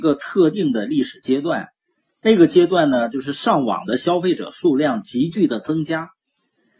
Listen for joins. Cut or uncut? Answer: uncut